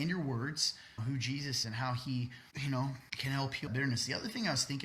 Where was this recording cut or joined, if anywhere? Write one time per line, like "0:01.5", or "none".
0:01.0
0:01.6
0:02.5
0:03.1
0:03.7